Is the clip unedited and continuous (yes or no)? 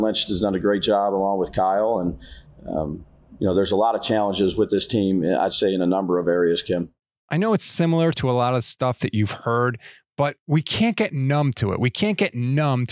yes